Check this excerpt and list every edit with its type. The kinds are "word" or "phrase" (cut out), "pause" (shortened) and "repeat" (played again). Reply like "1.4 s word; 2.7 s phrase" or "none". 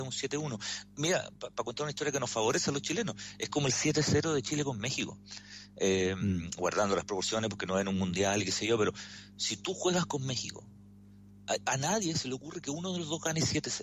none

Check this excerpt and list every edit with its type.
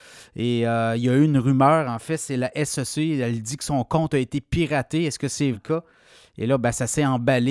5.5 s word

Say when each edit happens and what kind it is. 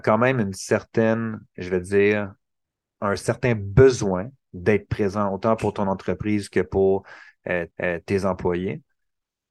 7.7 s repeat

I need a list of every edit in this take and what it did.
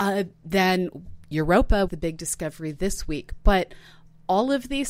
1.9 s word

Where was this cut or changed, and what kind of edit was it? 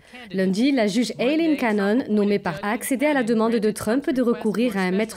2.6 s word

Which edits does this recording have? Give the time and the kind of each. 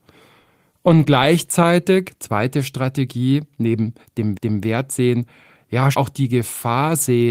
4.3 s repeat; 5.9 s word

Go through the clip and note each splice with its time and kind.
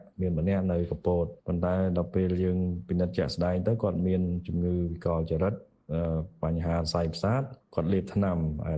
1.4 s pause

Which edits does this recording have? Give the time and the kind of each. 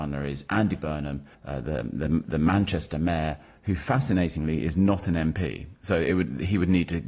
1.3 s pause

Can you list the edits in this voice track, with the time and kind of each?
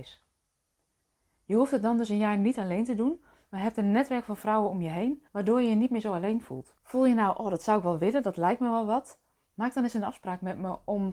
5.3 s pause; 6.8 s pause

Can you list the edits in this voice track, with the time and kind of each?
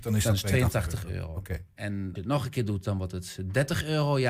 2.2 s word

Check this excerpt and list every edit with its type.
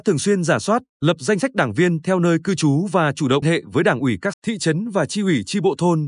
0.9 s pause; 3.4 s word; 4.3 s word

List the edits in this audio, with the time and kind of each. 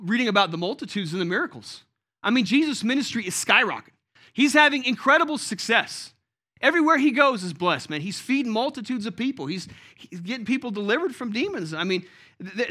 none

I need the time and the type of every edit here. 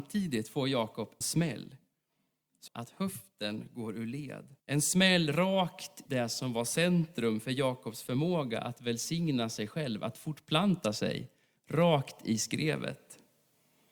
1.2 s word; 2.7 s phrase; 4.6 s pause; 6.1 s word

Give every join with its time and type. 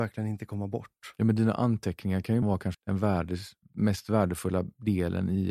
2.4 s word; 2.7 s word

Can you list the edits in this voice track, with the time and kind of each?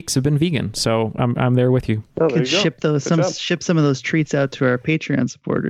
2.1 s pause

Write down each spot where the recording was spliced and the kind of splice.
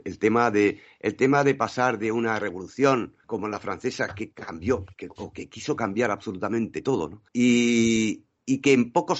3.2 s pause; 7.3 s pause

